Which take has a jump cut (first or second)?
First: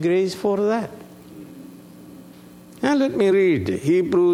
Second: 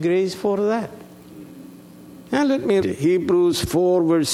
second